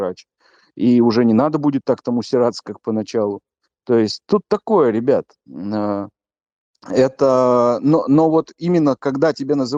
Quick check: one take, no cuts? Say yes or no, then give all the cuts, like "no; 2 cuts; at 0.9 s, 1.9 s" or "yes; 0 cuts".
yes; 0 cuts